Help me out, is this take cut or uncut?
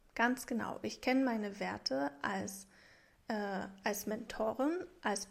uncut